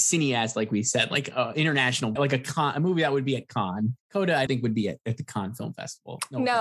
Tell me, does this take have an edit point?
yes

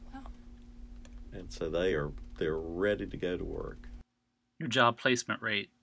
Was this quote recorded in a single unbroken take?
yes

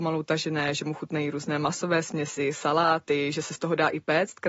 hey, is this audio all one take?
yes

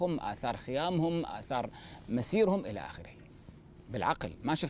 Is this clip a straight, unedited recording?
yes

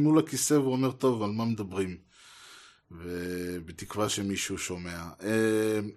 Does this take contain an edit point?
no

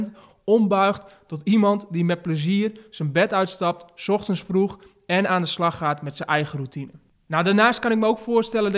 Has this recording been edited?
no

